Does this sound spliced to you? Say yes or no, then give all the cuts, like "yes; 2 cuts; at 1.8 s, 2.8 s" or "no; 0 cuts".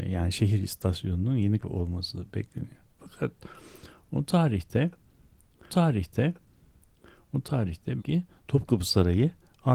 yes; 3 cuts; at 1.6 s, 5.7 s, 8.0 s